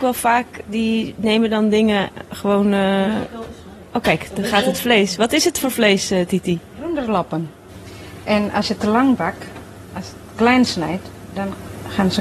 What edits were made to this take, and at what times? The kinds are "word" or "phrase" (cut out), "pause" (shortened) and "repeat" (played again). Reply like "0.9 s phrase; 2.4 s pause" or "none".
none

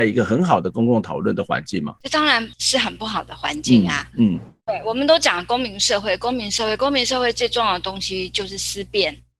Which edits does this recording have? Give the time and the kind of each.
2.5 s pause; 4.6 s pause

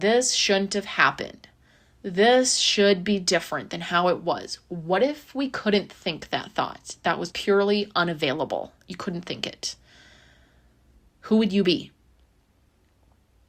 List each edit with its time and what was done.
7.3 s word

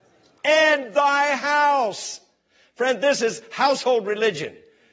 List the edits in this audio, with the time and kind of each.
none

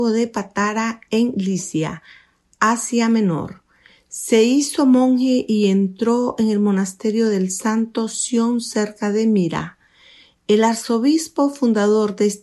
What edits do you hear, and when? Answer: none

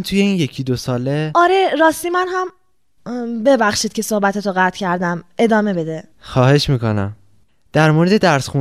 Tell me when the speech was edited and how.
6.1 s pause

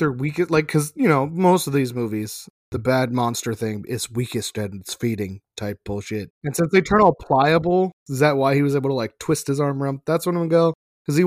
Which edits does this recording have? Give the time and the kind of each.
2.6 s pause; 6.3 s pause; 8.0 s pause

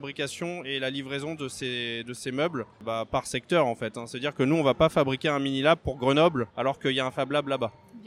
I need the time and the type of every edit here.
2.7 s pause; 6.5 s pause

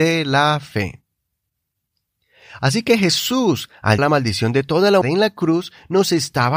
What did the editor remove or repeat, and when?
4.0 s word; 5.0 s word

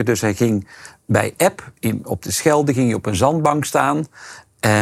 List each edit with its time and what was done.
none

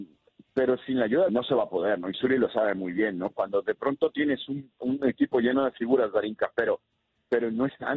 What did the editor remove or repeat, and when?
1.3 s phrase

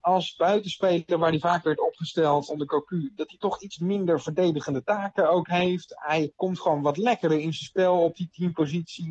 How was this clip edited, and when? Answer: 2.5 s word; 6.3 s pause

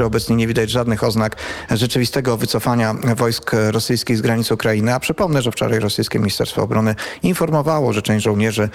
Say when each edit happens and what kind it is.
none

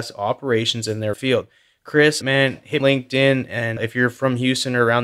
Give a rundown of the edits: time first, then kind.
1.1 s word; 2.2 s phrase; 2.8 s phrase

